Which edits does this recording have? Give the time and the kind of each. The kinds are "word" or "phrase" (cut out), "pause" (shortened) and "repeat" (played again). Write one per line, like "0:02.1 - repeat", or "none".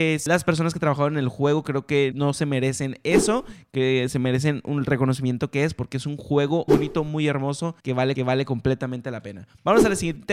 0:02.1 - word
0:06.7 - word
0:07.8 - pause
0:08.2 - repeat